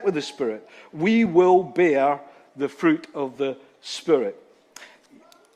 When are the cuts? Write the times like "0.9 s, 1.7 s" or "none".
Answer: none